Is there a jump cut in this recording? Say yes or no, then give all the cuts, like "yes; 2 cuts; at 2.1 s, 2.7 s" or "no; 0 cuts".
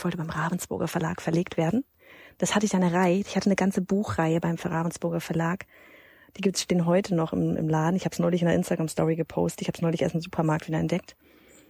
no; 0 cuts